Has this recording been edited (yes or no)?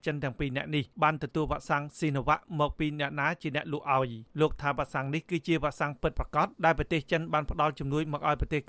yes